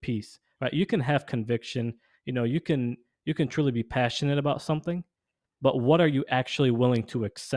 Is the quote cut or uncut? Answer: uncut